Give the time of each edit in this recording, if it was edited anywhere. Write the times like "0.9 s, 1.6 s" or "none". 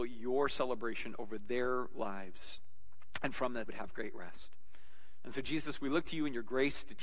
3.7 s